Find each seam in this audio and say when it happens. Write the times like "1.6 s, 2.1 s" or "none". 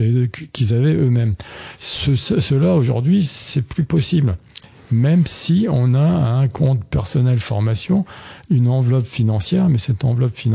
none